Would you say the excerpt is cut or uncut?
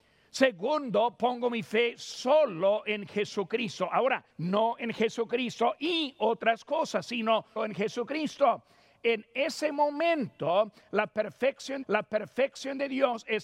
cut